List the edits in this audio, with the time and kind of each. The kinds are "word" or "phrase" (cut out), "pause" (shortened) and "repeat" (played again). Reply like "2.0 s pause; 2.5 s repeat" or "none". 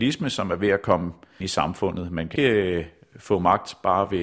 1.4 s word; 2.4 s word